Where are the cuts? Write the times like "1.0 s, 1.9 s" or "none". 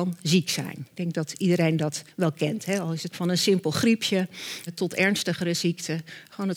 3.1 s, 4.7 s

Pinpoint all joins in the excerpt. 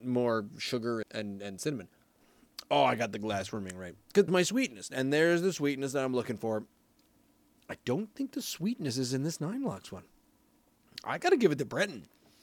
1.0 s, 4.3 s

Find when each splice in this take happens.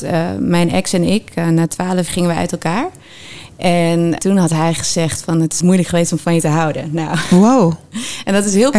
2.1 s, 4.2 s, 5.6 s

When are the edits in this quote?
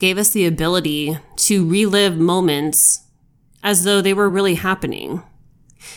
none

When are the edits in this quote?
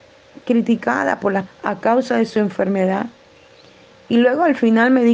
1.5 s

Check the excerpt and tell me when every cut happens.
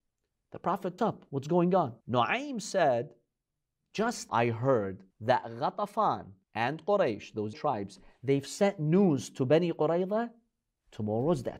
1.0 s, 2.0 s, 4.3 s, 5.1 s, 6.4 s, 7.5 s

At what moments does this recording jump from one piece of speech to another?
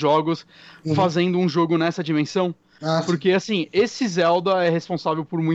none

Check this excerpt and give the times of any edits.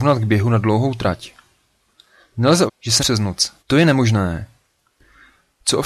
2.7 s, 3.0 s, 3.6 s

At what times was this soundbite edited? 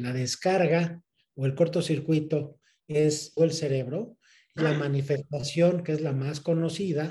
3.4 s, 4.6 s

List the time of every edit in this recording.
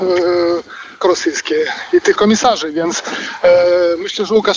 1.0 s, 2.1 s

